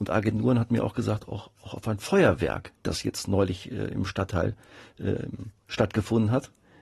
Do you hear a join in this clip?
no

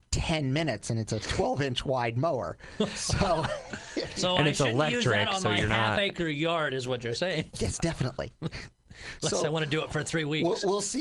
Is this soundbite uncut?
yes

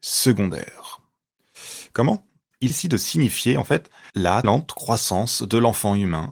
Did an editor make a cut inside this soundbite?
yes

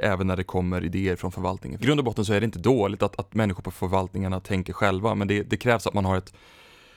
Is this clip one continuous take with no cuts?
no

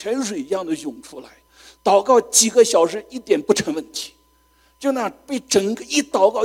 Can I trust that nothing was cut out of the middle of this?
yes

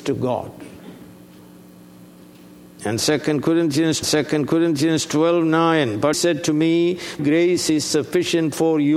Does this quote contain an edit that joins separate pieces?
yes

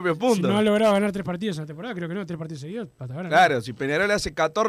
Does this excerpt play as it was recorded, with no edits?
yes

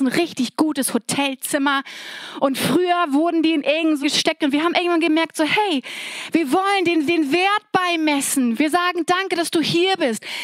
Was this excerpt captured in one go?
no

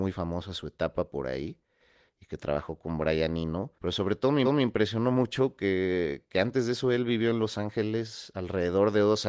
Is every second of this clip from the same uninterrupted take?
no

